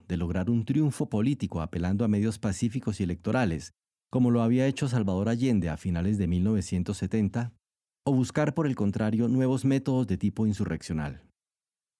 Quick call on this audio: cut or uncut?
uncut